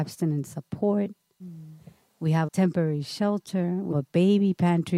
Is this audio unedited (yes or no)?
no